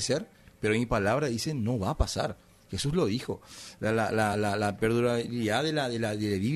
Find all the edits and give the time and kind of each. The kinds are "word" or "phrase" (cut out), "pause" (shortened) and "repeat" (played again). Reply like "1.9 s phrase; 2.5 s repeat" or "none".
none

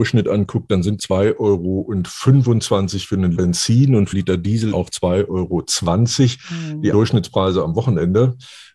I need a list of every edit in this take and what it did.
1.0 s word; 3.4 s word; 4.1 s word; 4.7 s word; 6.9 s word

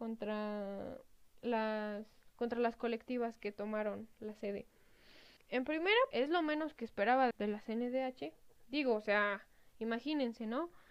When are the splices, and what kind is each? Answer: 5.4 s pause; 6.1 s word; 7.3 s word

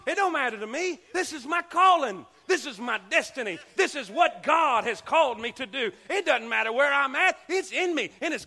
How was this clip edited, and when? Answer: none

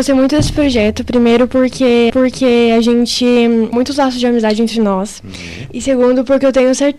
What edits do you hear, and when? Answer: 2.1 s repeat; 3.7 s word

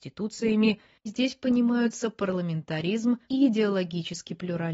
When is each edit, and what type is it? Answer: 1.1 s phrase; 3.2 s word

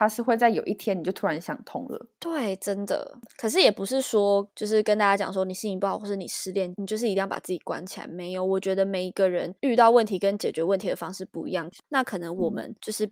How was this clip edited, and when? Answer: 2.1 s pause; 9.6 s pause

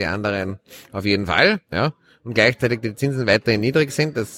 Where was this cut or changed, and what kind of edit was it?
1.7 s pause

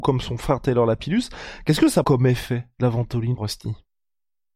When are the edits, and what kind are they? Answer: 2.0 s word; 3.4 s word

